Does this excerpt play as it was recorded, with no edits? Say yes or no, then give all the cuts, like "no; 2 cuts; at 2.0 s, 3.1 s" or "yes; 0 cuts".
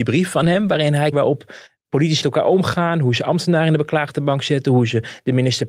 no; 2 cuts; at 1.1 s, 2.2 s